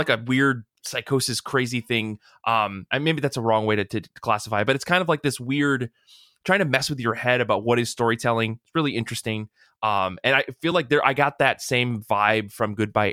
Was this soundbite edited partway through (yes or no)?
no